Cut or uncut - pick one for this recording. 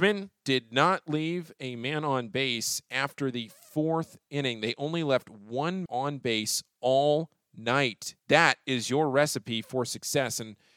cut